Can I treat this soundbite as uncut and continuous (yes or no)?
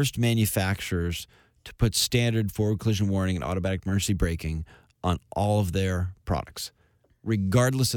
yes